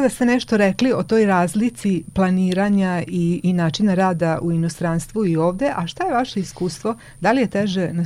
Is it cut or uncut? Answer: uncut